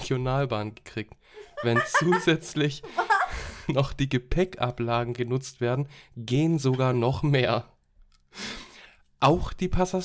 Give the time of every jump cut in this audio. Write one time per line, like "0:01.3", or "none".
none